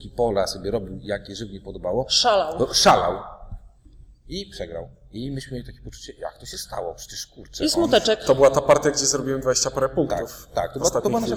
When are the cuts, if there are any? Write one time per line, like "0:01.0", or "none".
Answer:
none